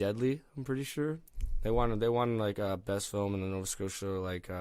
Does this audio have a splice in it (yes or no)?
no